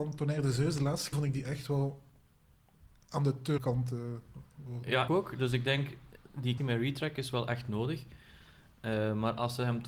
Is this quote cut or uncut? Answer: cut